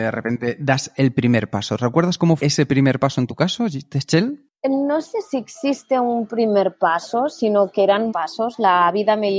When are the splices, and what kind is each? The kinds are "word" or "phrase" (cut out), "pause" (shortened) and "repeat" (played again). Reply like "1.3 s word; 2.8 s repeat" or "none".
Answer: 2.4 s word; 4.5 s pause; 8.1 s word